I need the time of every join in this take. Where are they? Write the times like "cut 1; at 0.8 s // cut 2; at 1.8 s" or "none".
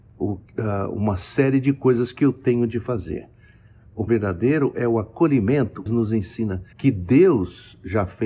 cut 1; at 4.1 s // cut 2; at 5.9 s // cut 3; at 6.7 s